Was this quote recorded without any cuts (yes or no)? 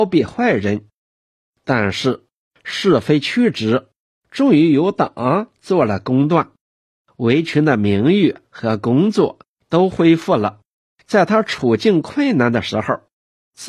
no